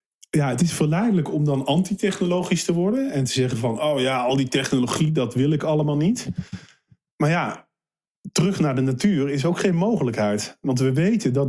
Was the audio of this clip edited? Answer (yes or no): no